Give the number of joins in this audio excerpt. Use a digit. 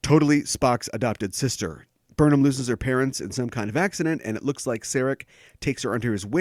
0